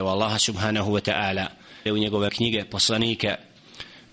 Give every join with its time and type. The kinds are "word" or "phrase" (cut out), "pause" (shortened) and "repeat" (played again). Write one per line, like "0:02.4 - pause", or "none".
0:01.9 - word
0:02.3 - phrase